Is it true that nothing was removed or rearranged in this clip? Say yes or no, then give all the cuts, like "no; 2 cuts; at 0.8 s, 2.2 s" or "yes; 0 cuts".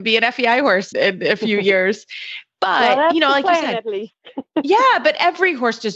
no; 1 cut; at 0.9 s